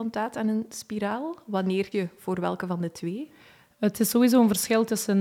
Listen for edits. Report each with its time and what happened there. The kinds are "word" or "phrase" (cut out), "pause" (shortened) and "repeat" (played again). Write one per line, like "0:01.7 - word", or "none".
0:01.9 - word